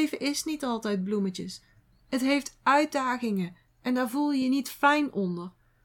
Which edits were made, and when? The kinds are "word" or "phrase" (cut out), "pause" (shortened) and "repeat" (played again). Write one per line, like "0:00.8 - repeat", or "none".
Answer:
none